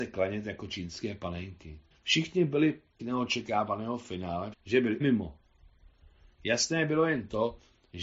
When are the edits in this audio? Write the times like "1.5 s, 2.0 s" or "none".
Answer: 1.9 s, 3.0 s, 4.5 s, 5.0 s